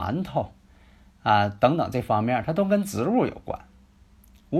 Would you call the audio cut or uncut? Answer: uncut